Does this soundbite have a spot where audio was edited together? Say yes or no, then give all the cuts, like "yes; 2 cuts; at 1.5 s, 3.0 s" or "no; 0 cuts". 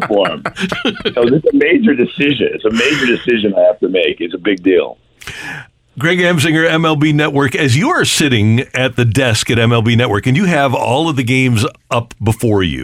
no; 0 cuts